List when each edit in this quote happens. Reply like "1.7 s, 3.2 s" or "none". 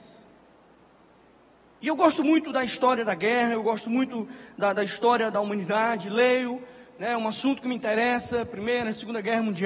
none

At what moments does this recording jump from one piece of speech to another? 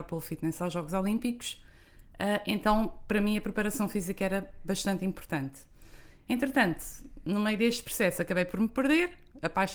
none

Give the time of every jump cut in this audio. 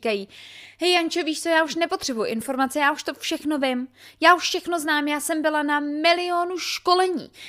none

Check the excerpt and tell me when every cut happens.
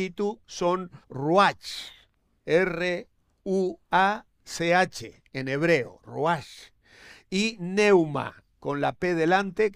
1.0 s

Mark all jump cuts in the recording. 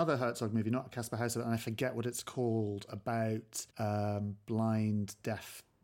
3.7 s

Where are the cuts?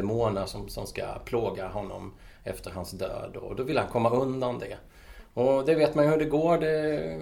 none

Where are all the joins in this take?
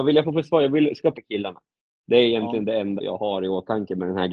1.1 s, 3.0 s

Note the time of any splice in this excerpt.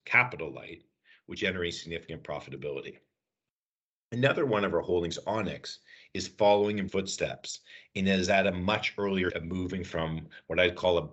1.4 s, 6.9 s, 9.3 s

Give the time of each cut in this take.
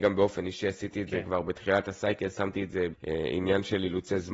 2.9 s

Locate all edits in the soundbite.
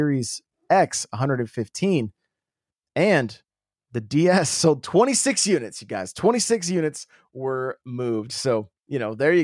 none

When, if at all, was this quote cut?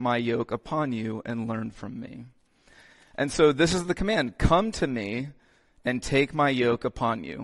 none

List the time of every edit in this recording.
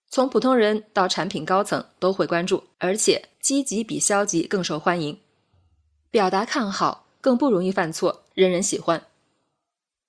2.7 s, 3.3 s, 8.3 s

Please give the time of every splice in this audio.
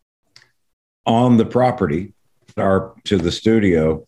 2.6 s, 3.0 s

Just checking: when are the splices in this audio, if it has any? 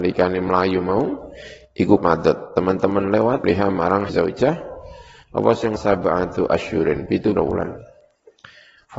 2.0 s, 3.4 s, 4.1 s, 5.8 s, 7.4 s

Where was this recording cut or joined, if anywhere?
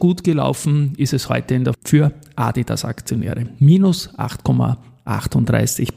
1.7 s

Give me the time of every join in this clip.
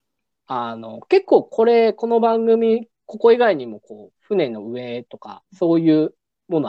5.4 s

